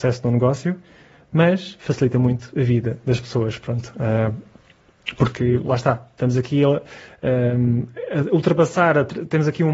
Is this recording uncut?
yes; 0 cuts

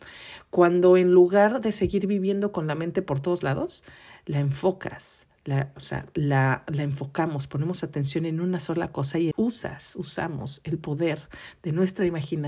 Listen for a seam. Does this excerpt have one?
yes; 1 cut; at 9.3 s

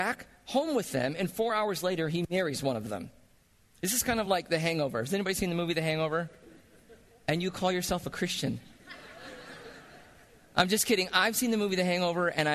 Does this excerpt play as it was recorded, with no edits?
yes; 0 cuts

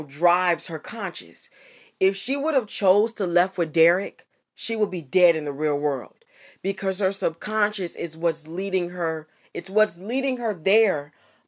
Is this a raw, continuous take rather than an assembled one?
yes; 0 cuts

